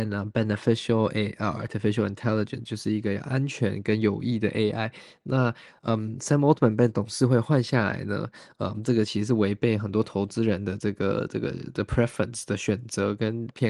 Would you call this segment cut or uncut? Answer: uncut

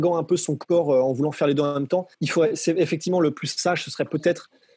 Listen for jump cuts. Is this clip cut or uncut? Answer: cut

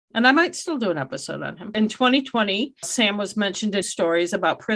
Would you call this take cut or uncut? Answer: cut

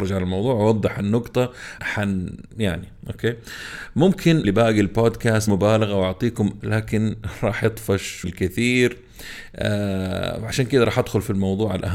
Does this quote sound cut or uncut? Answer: cut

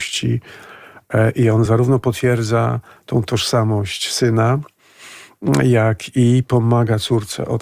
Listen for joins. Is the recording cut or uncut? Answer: uncut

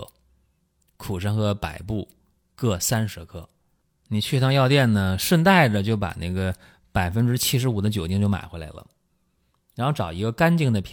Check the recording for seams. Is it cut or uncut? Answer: uncut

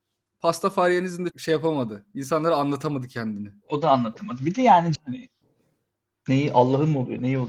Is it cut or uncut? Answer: cut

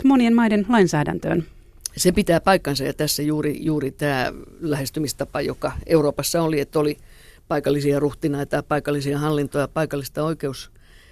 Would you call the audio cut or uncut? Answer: uncut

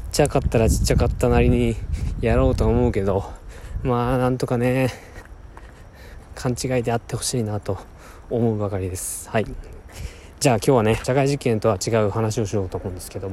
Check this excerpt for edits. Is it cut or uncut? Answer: cut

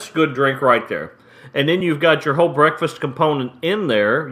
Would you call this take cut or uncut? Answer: uncut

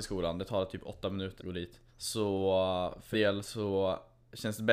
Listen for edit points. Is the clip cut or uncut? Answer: cut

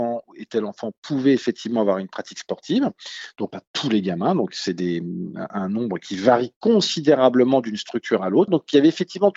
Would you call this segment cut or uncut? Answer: cut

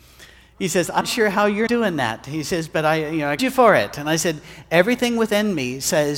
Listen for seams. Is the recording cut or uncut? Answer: cut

